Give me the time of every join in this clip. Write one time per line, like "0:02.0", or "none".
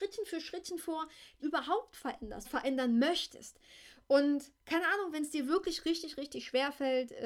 0:01.4
0:02.4
0:04.6